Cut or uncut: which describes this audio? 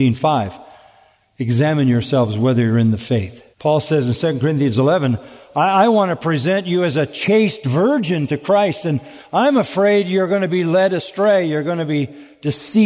cut